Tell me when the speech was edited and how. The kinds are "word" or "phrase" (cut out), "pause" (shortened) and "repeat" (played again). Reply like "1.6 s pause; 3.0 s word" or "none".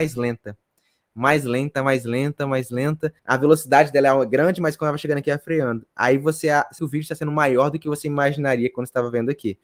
3.2 s pause; 6.8 s phrase